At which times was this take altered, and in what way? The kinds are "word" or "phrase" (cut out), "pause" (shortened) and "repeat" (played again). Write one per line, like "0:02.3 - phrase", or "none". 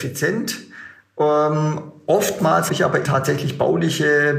0:02.7 - word
0:03.0 - word